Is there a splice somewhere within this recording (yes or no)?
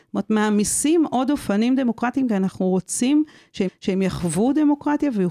yes